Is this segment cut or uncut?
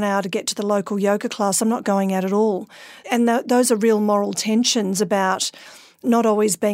uncut